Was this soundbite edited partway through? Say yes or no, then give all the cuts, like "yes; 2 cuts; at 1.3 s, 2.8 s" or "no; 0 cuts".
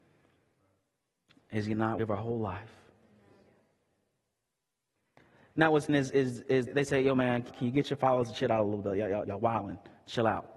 yes; 5 cuts; at 2.0 s, 5.9 s, 6.7 s, 7.5 s, 9.2 s